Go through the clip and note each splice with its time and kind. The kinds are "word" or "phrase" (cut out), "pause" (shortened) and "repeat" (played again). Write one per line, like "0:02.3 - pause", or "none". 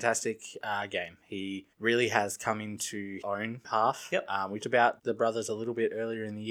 0:01.7 - pause
0:03.2 - word
0:03.6 - phrase
0:04.6 - word
0:05.0 - word